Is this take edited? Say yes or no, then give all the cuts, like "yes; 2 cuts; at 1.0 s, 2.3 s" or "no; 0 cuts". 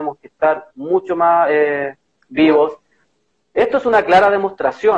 no; 0 cuts